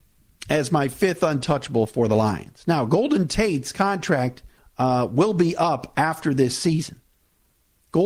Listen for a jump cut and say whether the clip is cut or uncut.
cut